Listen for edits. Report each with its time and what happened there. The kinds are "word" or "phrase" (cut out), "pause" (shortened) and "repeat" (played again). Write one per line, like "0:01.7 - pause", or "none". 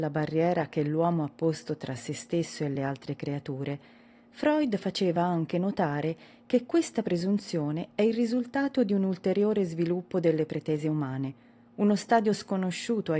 none